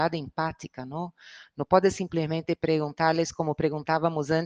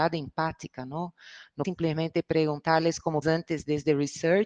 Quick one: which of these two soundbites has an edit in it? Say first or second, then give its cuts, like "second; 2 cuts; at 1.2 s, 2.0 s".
second; 2 cuts; at 1.6 s, 3.2 s